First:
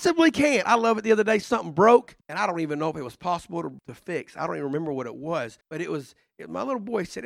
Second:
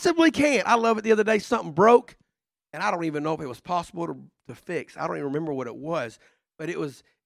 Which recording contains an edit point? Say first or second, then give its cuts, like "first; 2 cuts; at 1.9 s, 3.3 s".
first; 3 cuts; at 2.2 s, 3.8 s, 5.6 s